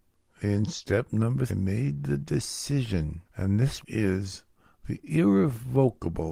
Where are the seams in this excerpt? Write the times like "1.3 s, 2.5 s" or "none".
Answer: 1.5 s, 3.3 s, 3.8 s